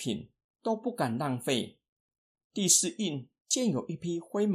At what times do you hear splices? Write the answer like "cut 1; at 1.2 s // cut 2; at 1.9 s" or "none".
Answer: none